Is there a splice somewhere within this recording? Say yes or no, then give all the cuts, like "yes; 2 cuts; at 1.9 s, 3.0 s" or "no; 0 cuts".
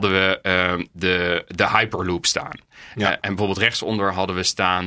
no; 0 cuts